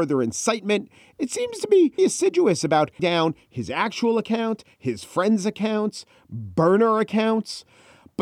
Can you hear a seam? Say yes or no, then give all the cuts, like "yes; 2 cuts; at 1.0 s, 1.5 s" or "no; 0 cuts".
yes; 2 cuts; at 2.0 s, 3.0 s